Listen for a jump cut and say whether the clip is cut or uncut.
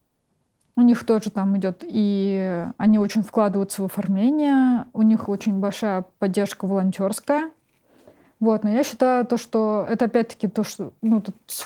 uncut